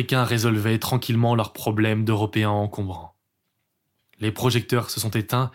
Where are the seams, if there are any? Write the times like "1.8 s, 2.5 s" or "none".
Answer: none